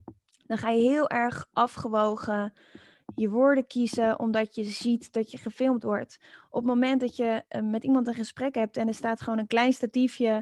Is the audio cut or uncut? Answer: uncut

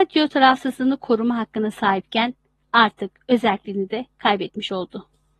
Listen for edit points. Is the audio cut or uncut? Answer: uncut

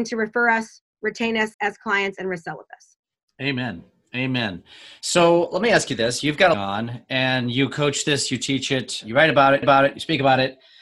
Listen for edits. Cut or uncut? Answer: cut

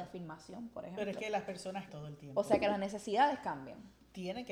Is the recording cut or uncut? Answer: cut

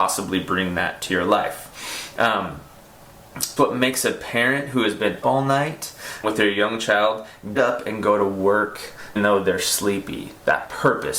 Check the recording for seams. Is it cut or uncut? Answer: cut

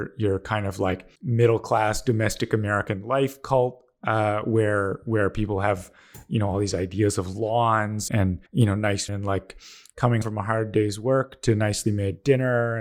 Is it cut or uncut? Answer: cut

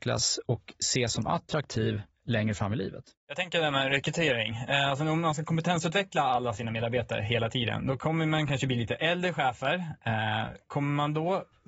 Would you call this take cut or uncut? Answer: uncut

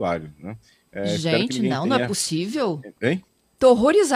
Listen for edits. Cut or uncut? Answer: cut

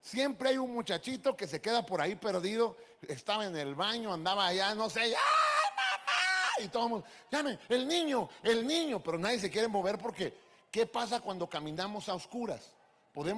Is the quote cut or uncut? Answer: uncut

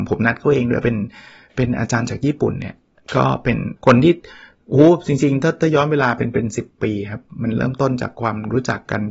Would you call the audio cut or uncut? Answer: cut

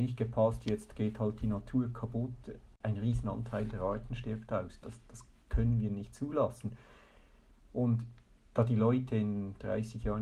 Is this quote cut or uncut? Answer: cut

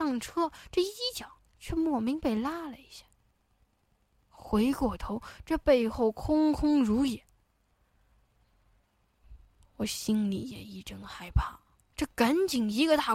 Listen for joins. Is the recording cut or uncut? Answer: uncut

